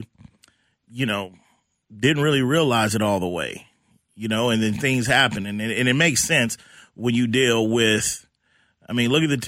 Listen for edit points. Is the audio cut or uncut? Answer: uncut